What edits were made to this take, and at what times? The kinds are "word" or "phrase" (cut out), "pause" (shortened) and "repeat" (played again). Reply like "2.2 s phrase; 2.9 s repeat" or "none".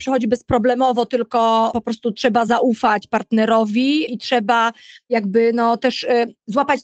none